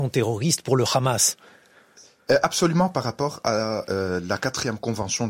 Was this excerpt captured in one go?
yes; 0 cuts

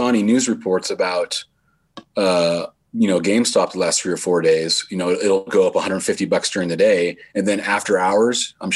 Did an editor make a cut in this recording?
no; 0 cuts

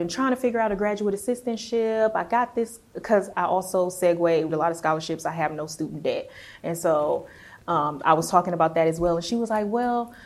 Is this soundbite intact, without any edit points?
no; 2 cuts; at 3.3 s, 4.5 s

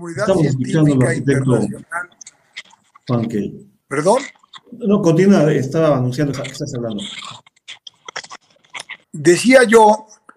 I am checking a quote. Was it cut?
yes; 4 cuts; at 3.8 s, 5.0 s, 6.3 s, 9.0 s

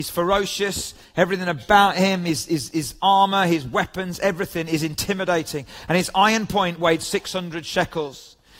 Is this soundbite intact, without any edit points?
yes; 0 cuts

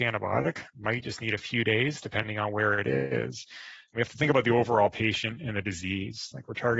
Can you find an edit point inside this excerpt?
no; 0 cuts

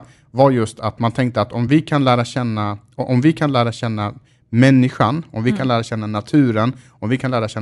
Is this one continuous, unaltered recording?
yes; 0 cuts

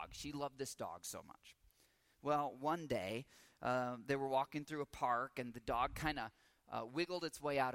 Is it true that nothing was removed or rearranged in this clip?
yes; 0 cuts

